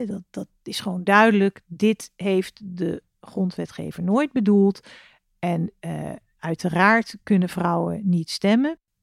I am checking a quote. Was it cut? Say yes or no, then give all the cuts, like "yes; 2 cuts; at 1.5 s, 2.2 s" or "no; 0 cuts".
no; 0 cuts